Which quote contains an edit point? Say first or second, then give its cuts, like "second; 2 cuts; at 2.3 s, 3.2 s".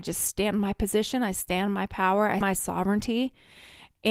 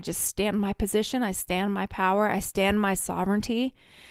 first; 1 cut; at 2.4 s